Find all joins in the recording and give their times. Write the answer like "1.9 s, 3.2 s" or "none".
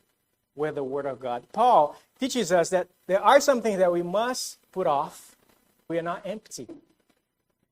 4.6 s, 5.9 s